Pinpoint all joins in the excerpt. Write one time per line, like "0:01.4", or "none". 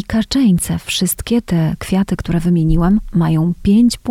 none

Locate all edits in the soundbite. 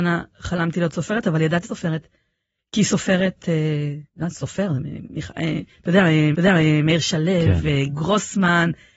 0:01.6
0:04.1
0:05.0
0:06.3

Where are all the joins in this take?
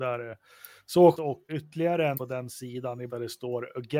0:01.1
0:01.5
0:02.1
0:03.1

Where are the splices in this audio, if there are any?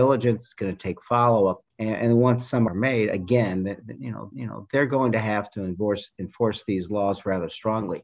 0:01.7
0:02.7
0:04.3

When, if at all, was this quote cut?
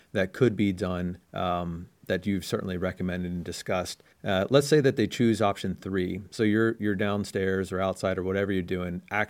0:01.2
0:04.1

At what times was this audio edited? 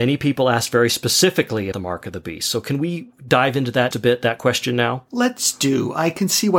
0:01.7
0:03.9

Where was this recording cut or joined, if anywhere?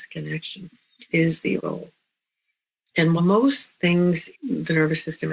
0:01.1
0:01.6
0:03.2
0:04.3

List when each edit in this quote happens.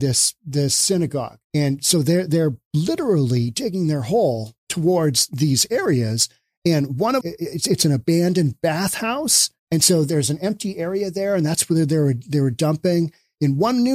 0:01.4
0:07.2
0:09.6

